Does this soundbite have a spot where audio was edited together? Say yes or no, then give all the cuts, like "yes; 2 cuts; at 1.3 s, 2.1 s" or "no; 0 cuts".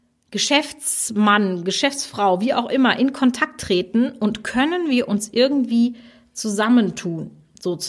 no; 0 cuts